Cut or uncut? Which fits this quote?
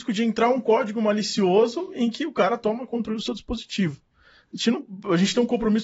cut